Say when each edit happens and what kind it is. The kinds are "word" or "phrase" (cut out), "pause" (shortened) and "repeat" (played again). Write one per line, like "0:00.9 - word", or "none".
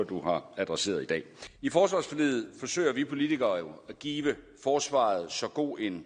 none